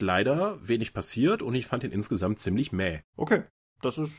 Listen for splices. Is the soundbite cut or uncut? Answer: uncut